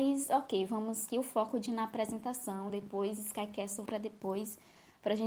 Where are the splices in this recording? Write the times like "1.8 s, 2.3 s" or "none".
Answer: 1.1 s, 1.7 s, 2.7 s, 3.9 s